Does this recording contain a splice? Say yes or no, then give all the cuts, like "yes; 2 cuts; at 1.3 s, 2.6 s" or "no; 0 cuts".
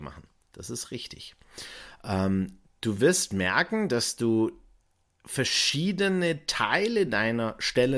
no; 0 cuts